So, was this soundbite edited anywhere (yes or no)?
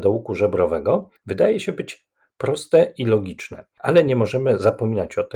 no